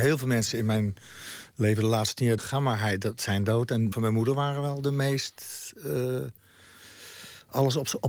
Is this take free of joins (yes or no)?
no